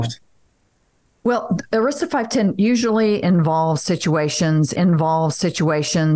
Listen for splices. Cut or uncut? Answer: cut